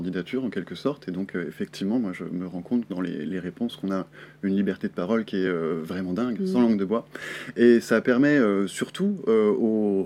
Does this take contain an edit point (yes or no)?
no